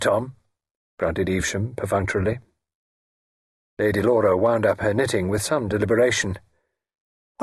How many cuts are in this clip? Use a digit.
0